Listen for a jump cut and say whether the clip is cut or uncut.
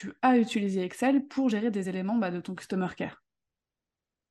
uncut